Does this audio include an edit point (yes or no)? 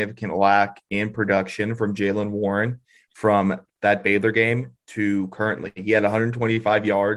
yes